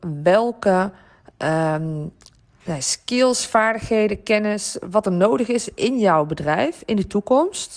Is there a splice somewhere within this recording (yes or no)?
no